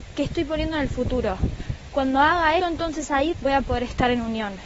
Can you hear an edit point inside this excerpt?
yes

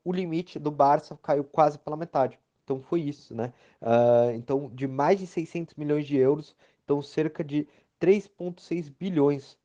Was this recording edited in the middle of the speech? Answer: no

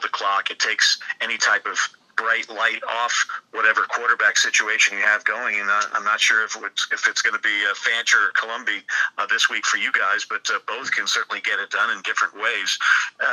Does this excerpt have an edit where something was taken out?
yes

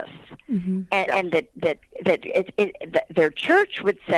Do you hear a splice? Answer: no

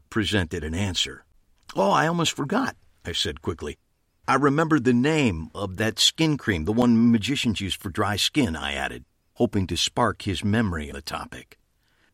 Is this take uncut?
no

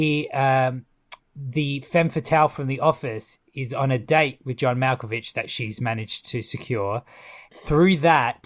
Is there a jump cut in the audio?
no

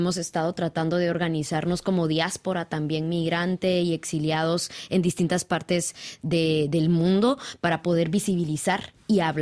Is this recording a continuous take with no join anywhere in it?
yes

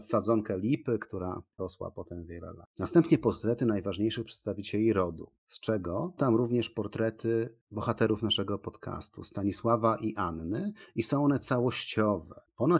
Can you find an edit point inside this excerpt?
yes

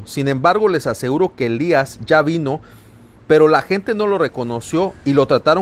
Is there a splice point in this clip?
no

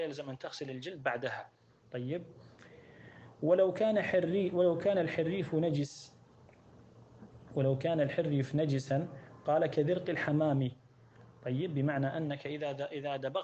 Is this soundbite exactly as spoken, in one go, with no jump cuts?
yes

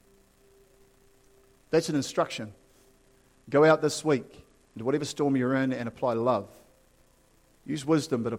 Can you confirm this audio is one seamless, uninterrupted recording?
yes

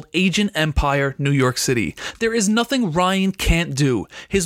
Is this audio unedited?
yes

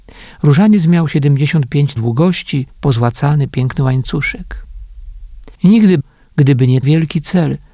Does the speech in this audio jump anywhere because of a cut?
yes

